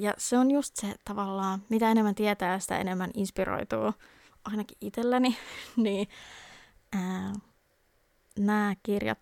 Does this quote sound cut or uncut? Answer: uncut